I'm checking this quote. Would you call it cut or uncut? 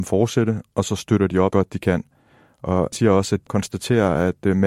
cut